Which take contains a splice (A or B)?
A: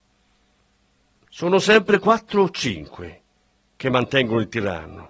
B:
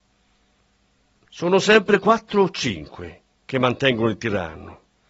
B